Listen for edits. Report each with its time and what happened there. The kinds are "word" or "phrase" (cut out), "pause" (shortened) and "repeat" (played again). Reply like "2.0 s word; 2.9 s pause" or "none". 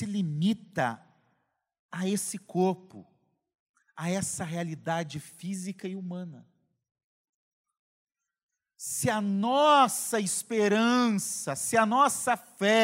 none